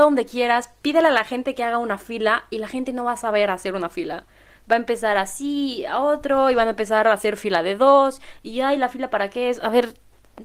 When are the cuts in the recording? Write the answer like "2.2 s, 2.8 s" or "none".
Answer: none